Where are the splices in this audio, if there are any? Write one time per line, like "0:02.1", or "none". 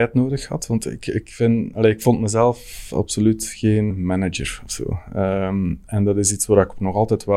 0:03.9